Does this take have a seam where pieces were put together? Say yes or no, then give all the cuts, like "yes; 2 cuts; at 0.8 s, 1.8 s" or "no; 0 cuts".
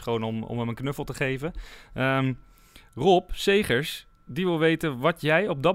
no; 0 cuts